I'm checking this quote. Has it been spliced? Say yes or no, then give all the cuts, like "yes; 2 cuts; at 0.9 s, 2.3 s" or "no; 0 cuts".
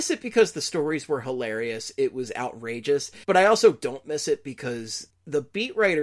yes; 2 cuts; at 3.2 s, 5.1 s